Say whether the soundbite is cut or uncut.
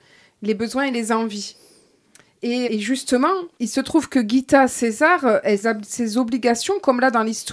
cut